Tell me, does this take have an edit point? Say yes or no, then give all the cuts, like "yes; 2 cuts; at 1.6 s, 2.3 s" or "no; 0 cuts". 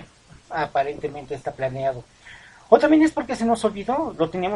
no; 0 cuts